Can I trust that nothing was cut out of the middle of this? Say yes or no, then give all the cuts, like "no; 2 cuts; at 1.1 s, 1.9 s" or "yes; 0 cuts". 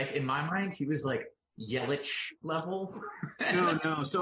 no; 1 cut; at 2.4 s